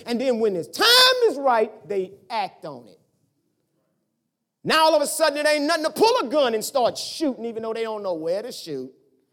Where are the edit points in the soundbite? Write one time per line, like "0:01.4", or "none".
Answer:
none